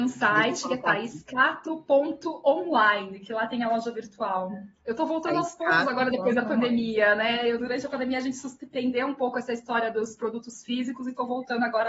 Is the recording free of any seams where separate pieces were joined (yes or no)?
no